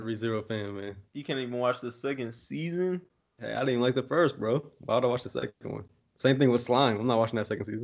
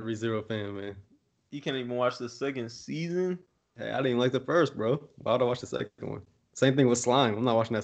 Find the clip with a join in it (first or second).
first